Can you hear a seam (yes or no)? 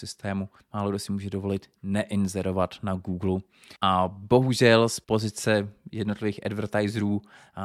yes